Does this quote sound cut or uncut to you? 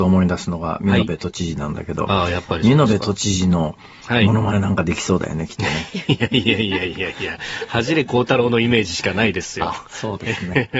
uncut